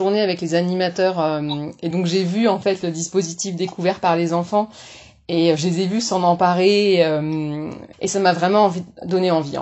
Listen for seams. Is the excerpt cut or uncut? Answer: uncut